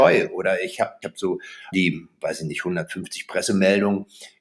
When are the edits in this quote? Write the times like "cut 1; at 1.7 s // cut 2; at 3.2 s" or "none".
cut 1; at 1.0 s // cut 2; at 1.7 s